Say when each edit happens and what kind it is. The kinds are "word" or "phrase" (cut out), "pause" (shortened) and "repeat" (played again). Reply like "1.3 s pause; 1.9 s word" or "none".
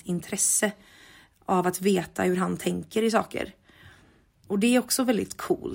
none